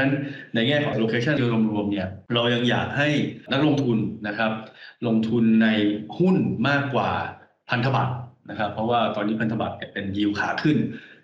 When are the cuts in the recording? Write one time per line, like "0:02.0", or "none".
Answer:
0:00.9
0:01.4